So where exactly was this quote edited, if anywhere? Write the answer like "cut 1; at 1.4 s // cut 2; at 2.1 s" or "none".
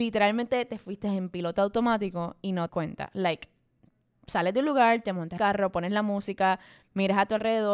cut 1; at 2.7 s // cut 2; at 5.4 s